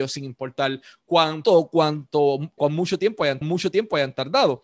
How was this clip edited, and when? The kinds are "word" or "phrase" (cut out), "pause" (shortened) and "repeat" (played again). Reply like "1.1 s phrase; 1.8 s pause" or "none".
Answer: 1.4 s word; 2.6 s word; 3.4 s repeat